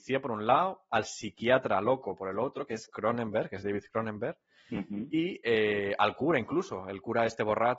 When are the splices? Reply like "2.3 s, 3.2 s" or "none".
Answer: none

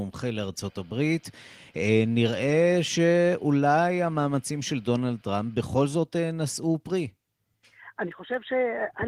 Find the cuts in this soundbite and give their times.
none

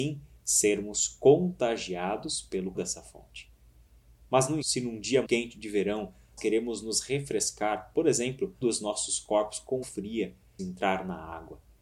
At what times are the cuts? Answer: 2.7 s, 4.6 s, 5.2 s, 6.4 s, 8.6 s, 9.8 s, 10.6 s

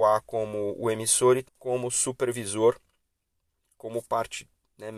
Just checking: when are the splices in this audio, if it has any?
1.4 s

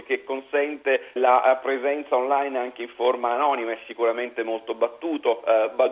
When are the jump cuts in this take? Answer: 1.2 s

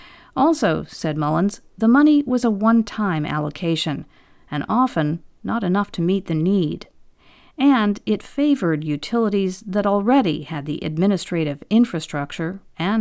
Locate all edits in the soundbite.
none

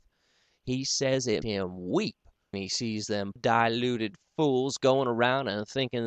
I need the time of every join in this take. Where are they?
1.4 s, 2.5 s, 3.4 s

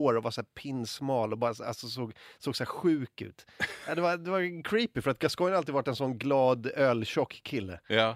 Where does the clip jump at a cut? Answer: none

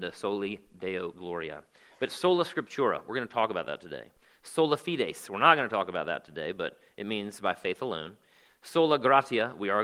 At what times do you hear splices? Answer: none

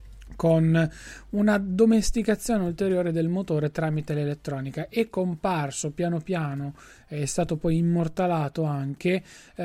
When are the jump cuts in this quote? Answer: none

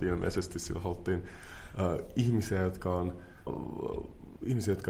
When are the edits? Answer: 3.5 s

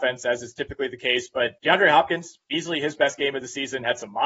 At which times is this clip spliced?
1.6 s

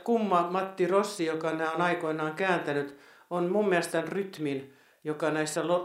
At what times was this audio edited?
3.9 s

